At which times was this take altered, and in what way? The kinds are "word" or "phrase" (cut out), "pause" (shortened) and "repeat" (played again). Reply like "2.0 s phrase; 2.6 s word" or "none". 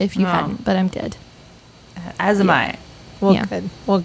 0.9 s phrase